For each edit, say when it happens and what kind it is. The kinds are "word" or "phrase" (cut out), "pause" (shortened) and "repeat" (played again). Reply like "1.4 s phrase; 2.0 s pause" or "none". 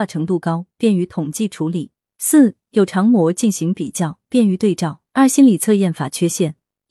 5.1 s pause